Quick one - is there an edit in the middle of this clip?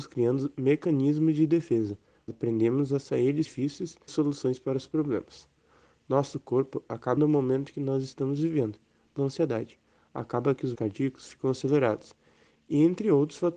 yes; 6 cuts; at 2.3 s, 3.4 s, 4.1 s, 7.2 s, 9.2 s, 10.7 s

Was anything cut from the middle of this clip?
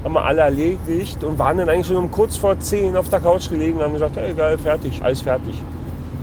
yes; 1 cut; at 5.0 s

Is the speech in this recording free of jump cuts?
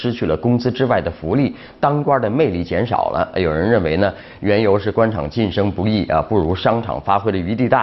yes; 0 cuts

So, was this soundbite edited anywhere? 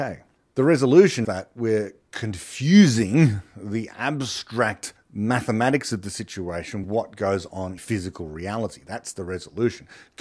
yes; 4 cuts; at 1.2 s, 5.0 s, 6.8 s, 7.8 s

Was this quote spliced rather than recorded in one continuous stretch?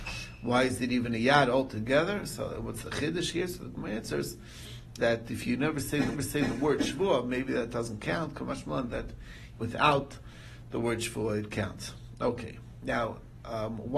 yes; 3 cuts; at 5.0 s, 6.1 s, 9.6 s

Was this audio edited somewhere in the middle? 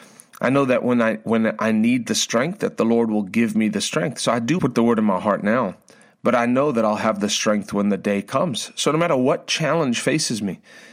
yes; 1 cut; at 4.6 s

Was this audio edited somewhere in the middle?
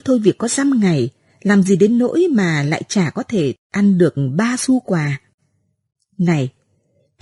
no; 0 cuts

